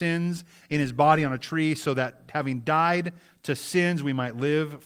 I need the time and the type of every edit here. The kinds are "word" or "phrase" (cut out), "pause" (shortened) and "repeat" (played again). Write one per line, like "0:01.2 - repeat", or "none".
none